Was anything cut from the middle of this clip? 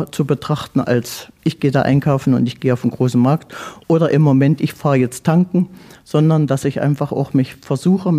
no; 0 cuts

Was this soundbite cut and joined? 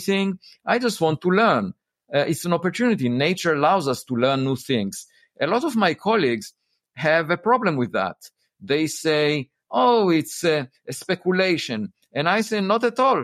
no; 0 cuts

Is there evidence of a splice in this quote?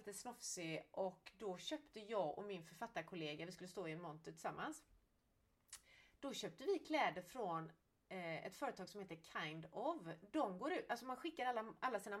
no; 0 cuts

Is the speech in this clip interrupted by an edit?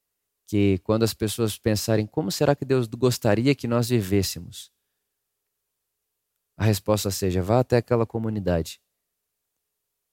no; 0 cuts

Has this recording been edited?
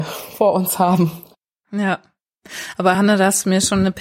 no; 0 cuts

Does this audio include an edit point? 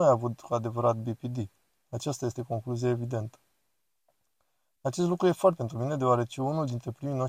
yes; 1 cut; at 5.6 s

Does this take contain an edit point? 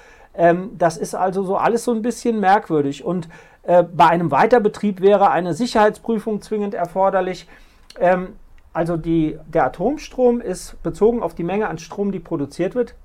no; 0 cuts

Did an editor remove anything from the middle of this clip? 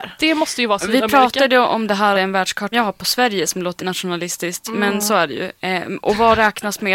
yes; 3 cuts; at 2.1 s, 2.7 s, 3.8 s

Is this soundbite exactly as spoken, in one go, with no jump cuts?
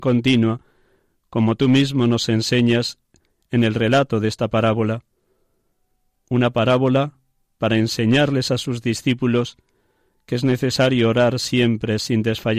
yes; 0 cuts

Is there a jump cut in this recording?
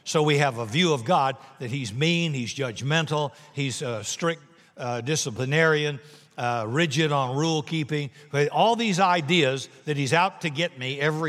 no; 0 cuts

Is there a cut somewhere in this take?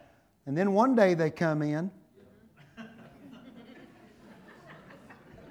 no; 0 cuts

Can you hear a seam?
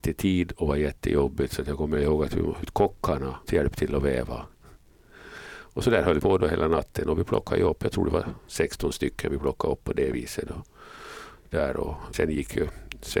yes; 4 cuts; at 2.6 s, 3.5 s, 6.2 s, 12.1 s

